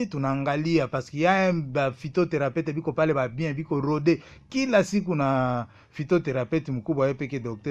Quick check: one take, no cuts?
yes; 0 cuts

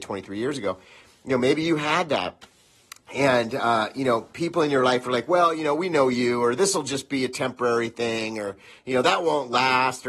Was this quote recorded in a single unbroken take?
yes; 0 cuts

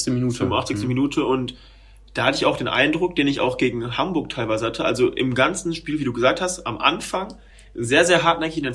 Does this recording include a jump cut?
no; 0 cuts

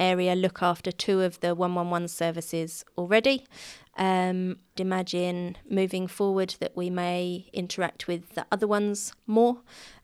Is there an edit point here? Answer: yes; 1 cut; at 4.8 s

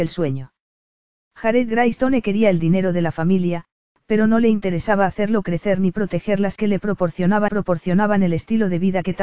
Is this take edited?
yes; 2 cuts; at 6.6 s, 7.5 s

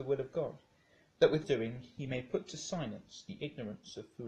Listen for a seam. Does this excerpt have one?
yes; 1 cut; at 1.4 s

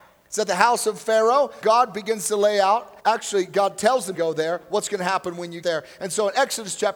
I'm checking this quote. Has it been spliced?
yes; 4 cuts; at 1.6 s, 3.0 s, 4.1 s, 5.6 s

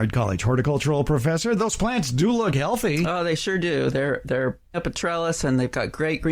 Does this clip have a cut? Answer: yes; 1 cut; at 4.7 s

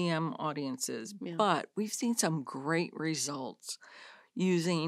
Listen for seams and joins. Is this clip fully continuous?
yes; 0 cuts

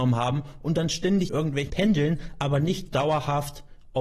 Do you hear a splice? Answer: yes; 3 cuts; at 1.3 s, 1.7 s, 2.9 s

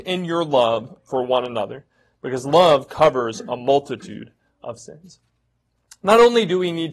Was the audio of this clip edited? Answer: no; 0 cuts

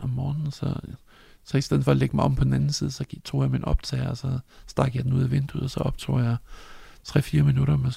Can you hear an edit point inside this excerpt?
no; 0 cuts

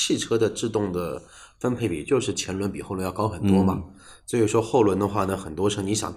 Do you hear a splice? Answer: no; 0 cuts

